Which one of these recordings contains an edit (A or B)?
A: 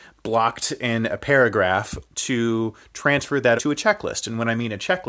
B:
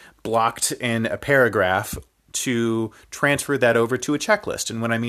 A